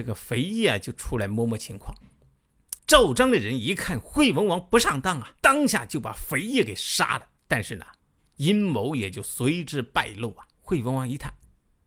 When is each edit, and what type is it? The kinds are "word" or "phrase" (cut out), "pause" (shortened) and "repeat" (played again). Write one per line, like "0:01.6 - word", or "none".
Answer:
0:02.8 - pause
0:05.4 - pause
0:07.4 - pause
0:08.0 - pause
0:10.5 - pause